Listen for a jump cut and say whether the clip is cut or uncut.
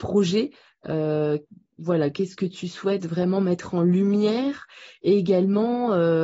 uncut